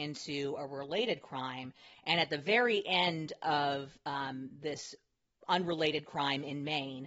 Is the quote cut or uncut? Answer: uncut